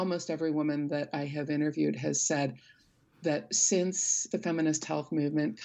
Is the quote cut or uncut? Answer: uncut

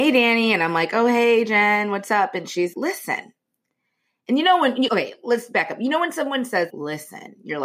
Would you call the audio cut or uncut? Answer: cut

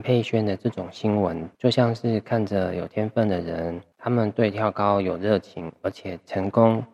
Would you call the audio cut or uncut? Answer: cut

